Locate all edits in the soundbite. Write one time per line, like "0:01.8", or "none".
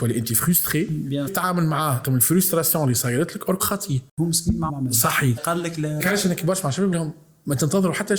0:01.3
0:02.0
0:03.6
0:04.7
0:05.4
0:06.0
0:06.4
0:06.9

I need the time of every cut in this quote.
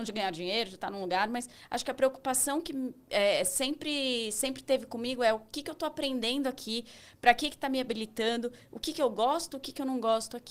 none

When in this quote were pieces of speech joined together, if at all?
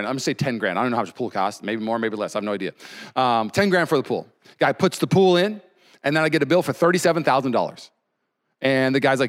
none

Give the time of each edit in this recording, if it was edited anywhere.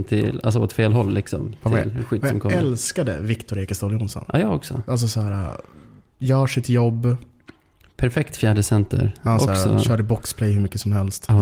none

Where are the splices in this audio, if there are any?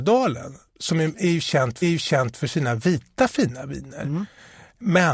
0:01.8

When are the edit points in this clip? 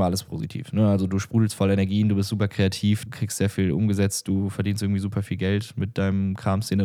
0:03.1

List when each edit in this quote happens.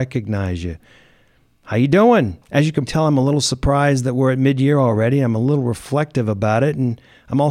0:02.4
0:02.9

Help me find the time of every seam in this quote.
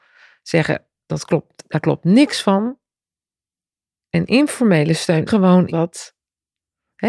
0:05.3
0:05.7

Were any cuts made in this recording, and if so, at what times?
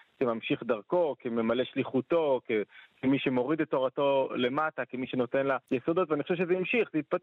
0:05.6

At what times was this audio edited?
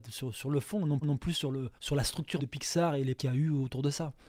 0:01.0
0:01.8
0:02.4
0:03.2

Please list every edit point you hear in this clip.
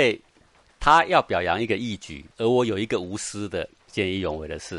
0:02.3

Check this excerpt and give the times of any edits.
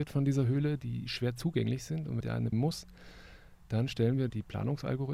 0:02.2
0:02.5

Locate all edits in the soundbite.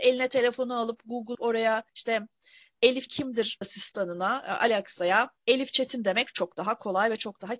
0:01.3
0:01.9
0:03.1
0:03.6
0:05.4
0:06.3

